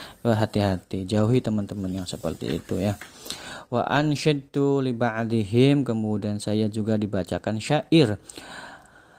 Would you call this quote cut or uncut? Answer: uncut